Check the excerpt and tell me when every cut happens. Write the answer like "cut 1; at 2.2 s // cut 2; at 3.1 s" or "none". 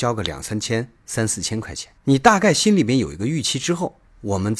cut 1; at 2.0 s